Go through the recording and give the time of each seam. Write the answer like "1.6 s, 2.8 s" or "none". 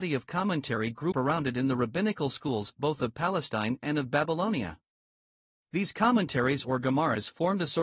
1.1 s